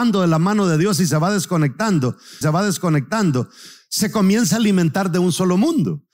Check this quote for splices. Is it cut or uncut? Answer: cut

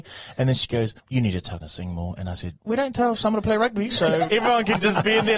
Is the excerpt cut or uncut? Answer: cut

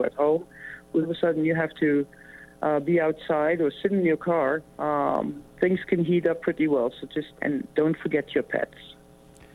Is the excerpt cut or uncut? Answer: cut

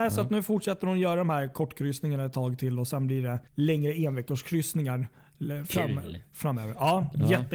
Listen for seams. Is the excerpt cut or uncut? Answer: cut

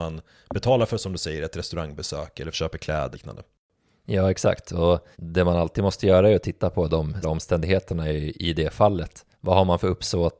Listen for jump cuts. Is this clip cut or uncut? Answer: cut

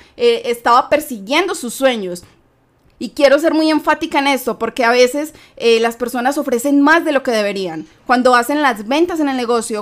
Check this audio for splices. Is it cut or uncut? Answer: uncut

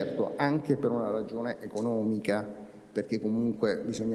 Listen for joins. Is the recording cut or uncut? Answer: uncut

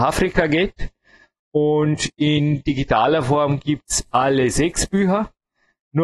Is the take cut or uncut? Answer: uncut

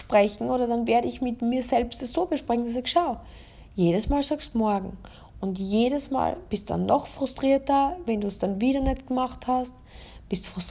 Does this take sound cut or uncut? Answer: uncut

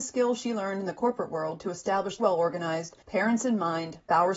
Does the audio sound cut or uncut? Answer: cut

